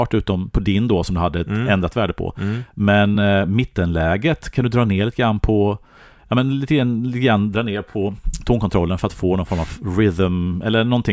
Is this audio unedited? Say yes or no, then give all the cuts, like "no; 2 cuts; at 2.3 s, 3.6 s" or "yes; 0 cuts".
yes; 0 cuts